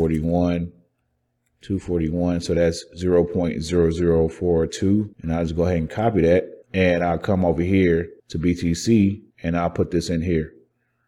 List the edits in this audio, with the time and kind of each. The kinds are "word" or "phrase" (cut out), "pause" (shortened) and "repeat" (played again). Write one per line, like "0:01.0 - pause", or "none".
0:05.1 - pause
0:06.6 - pause
0:08.2 - pause
0:09.3 - pause